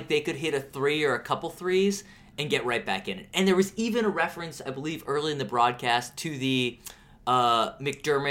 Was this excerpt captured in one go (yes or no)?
yes